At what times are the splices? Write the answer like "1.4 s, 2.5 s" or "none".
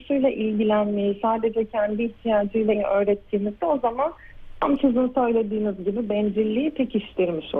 2.7 s